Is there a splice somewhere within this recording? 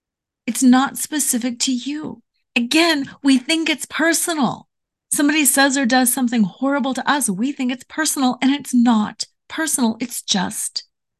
yes; 2 cuts; at 2.3 s, 4.8 s

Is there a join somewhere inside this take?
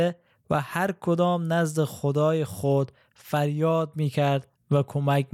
no; 0 cuts

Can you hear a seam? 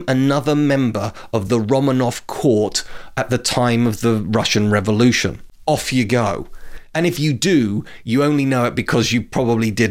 no; 0 cuts

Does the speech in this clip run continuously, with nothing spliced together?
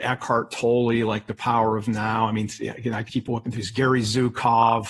no; 1 cut; at 3.1 s

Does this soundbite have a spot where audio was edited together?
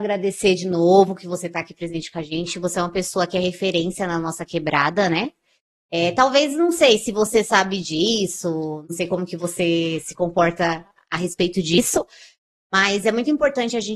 no; 0 cuts

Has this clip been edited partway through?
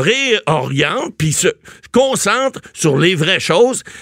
no; 0 cuts

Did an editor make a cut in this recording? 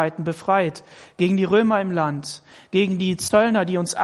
no; 0 cuts

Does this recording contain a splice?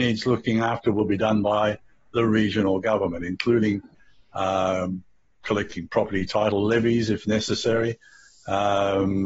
no; 0 cuts

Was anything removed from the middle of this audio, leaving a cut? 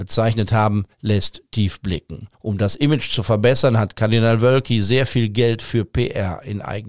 yes; 2 cuts; at 0.9 s, 2.3 s

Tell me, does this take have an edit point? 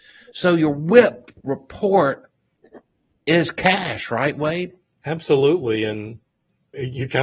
no; 0 cuts

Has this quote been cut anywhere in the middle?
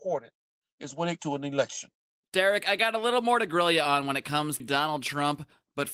yes; 3 cuts; at 1.2 s, 2.1 s, 4.6 s

